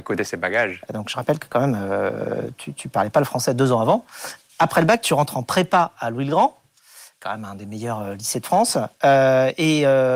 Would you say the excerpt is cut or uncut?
cut